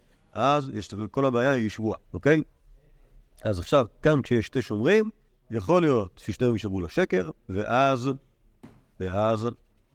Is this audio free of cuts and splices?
no; 3 cuts; at 2.0 s, 5.3 s, 7.4 s

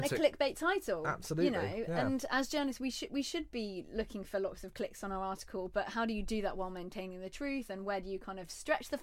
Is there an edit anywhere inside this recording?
no; 0 cuts

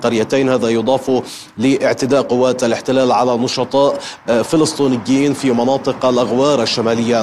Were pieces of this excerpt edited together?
no; 0 cuts

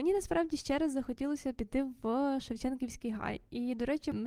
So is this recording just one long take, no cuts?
yes; 0 cuts

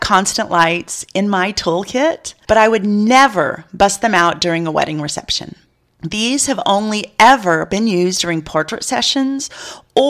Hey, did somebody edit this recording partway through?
no; 0 cuts

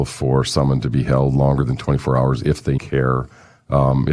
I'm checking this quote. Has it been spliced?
yes; 1 cut; at 2.8 s

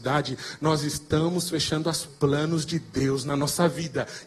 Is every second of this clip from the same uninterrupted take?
no; 1 cut; at 2.1 s

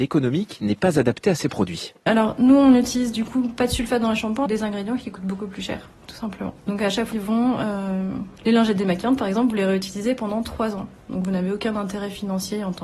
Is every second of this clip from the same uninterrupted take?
no; 4 cuts; at 4.5 s, 6.6 s, 7.1 s, 8.4 s

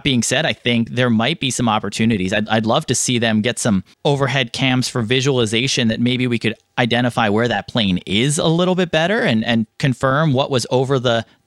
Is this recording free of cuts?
no; 2 cuts; at 3.9 s, 9.7 s

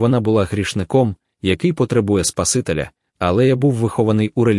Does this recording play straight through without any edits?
yes; 0 cuts

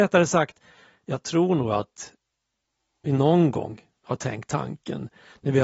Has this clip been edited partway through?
no; 0 cuts

